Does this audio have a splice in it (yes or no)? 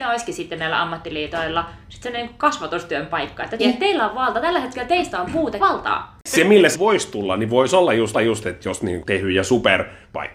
yes